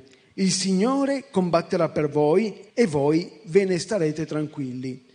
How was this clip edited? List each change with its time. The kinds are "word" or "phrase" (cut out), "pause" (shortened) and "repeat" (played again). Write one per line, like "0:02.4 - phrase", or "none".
0:02.7 - pause